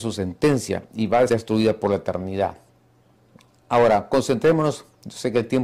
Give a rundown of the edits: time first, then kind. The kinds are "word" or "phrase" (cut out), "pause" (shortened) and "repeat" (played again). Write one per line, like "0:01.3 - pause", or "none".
0:01.3 - word